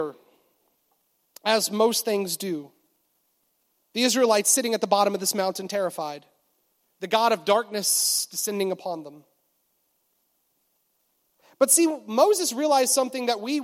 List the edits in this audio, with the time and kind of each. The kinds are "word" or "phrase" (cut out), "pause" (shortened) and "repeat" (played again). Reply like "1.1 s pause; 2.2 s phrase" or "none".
none